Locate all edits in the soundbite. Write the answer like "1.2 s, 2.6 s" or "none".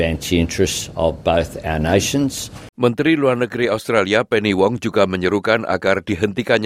2.7 s